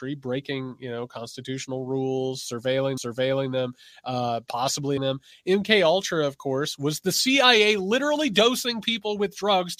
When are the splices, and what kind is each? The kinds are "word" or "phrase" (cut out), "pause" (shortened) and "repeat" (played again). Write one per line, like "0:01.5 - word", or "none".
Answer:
0:03.0 - repeat
0:05.0 - word